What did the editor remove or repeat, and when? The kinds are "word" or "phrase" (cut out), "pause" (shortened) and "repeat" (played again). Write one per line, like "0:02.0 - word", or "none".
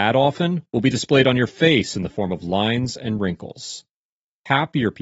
none